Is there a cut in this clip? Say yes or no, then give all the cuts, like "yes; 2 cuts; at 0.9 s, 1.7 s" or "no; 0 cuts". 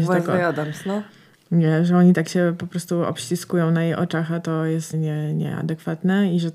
yes; 1 cut; at 4.9 s